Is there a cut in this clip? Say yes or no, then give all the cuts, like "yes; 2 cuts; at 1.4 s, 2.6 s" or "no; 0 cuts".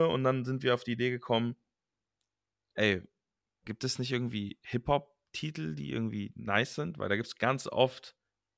no; 0 cuts